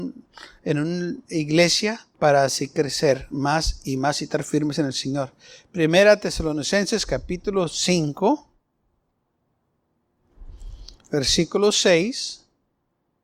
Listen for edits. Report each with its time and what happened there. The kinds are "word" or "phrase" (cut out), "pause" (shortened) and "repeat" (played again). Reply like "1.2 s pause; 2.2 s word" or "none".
2.1 s pause